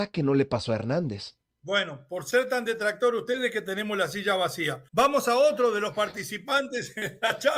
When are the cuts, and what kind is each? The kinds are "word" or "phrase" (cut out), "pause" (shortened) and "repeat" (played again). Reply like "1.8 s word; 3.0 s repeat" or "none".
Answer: 1.4 s pause; 4.9 s pause